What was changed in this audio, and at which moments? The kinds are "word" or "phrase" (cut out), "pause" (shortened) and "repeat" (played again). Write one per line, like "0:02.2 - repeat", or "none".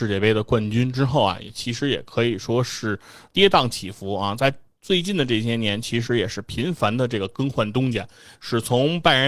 0:03.3 - word